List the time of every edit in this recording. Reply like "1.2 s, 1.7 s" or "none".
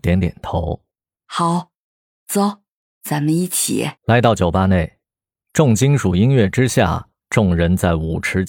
0.9 s, 4.0 s